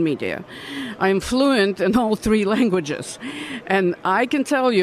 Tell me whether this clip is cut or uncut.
uncut